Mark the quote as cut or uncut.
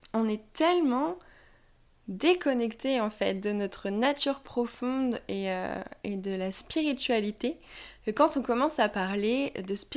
uncut